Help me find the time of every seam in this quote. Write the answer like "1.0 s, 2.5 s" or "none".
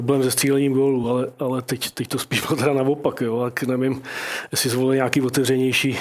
none